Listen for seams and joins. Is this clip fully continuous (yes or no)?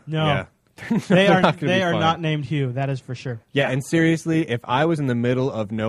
yes